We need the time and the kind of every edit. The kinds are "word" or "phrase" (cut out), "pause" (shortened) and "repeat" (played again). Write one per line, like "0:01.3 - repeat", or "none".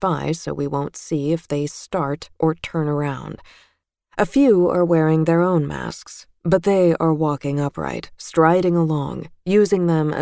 none